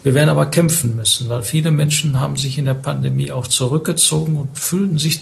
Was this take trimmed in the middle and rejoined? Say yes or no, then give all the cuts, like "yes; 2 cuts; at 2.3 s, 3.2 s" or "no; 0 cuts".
no; 0 cuts